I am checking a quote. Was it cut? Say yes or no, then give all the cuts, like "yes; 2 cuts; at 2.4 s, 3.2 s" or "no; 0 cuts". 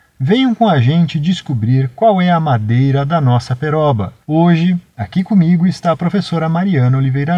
yes; 1 cut; at 4.2 s